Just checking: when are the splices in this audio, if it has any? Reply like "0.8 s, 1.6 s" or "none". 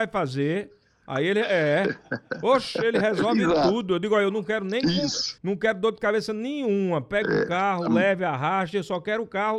5.4 s